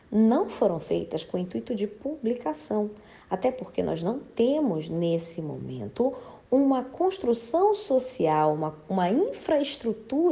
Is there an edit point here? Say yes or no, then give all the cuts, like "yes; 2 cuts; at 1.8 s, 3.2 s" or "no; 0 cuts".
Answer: no; 0 cuts